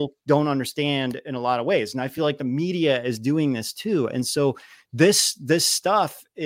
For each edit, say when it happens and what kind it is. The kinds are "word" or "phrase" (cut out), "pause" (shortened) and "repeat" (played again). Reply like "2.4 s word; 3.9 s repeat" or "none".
none